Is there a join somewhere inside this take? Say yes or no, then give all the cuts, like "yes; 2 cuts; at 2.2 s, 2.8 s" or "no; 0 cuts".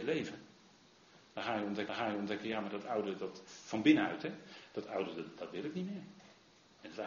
yes; 1 cut; at 1.9 s